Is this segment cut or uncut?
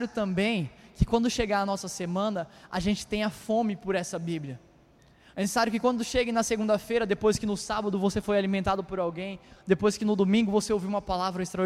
uncut